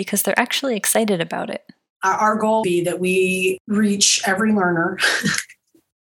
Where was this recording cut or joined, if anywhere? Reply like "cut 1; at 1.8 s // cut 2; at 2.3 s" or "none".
cut 1; at 2.6 s

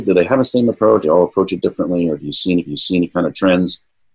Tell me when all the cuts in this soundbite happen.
cut 1; at 1.0 s // cut 2; at 2.6 s

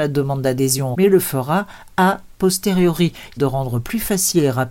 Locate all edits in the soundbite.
cut 1; at 0.9 s // cut 2; at 3.4 s

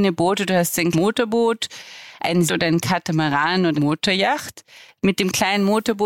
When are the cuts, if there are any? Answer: cut 1; at 0.9 s // cut 2; at 2.5 s // cut 3; at 3.7 s

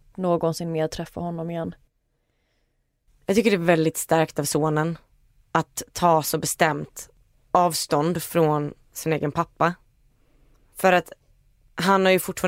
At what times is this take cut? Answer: none

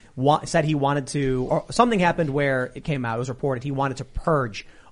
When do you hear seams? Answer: cut 1; at 1.5 s

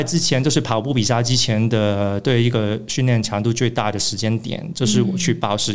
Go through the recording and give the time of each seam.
none

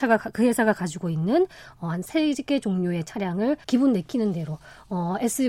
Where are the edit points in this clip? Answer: cut 1; at 3.6 s

